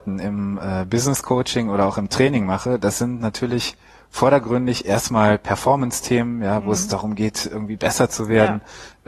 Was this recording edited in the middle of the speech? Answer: no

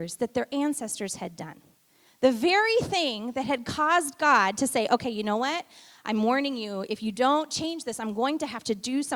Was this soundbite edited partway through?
no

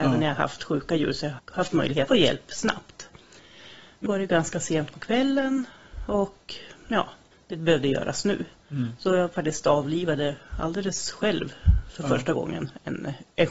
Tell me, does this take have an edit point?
yes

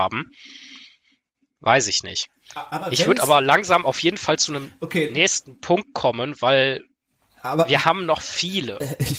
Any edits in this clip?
no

